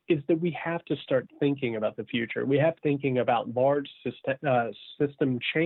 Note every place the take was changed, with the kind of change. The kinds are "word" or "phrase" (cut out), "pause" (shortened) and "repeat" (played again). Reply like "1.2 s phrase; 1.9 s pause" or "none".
2.8 s word